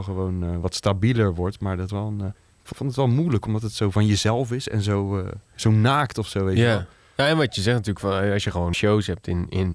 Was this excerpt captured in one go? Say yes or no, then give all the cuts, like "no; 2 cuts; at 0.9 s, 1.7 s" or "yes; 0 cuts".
no; 5 cuts; at 1.9 s, 2.3 s, 2.7 s, 5.5 s, 8.7 s